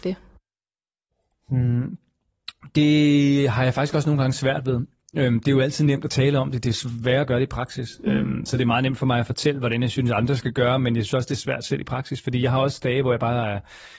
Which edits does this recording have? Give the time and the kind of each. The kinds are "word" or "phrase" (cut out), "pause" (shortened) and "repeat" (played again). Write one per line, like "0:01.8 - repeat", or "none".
none